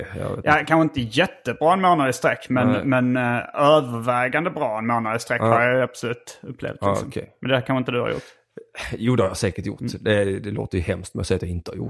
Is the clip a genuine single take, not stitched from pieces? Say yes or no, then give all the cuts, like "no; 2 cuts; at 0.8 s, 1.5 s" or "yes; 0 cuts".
yes; 0 cuts